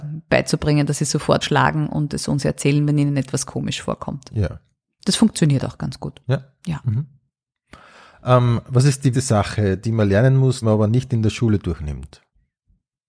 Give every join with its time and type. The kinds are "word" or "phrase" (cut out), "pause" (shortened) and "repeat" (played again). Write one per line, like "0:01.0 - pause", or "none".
0:01.4 - word
0:09.1 - word
0:10.6 - word